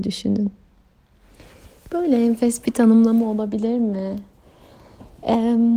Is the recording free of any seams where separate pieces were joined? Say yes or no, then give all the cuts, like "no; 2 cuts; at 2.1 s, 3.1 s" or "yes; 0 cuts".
yes; 0 cuts